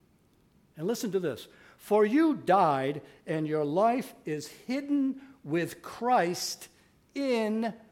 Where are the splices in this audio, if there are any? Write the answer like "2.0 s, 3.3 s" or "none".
none